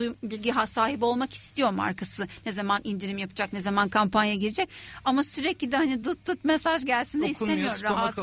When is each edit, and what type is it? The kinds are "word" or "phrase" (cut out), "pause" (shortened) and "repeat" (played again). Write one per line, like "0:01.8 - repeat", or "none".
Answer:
none